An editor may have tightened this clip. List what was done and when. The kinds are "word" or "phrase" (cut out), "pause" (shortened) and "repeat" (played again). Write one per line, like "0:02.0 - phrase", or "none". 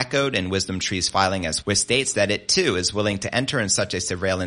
0:01.6 - word